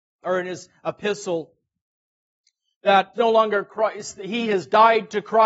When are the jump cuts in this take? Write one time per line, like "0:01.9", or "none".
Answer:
0:03.1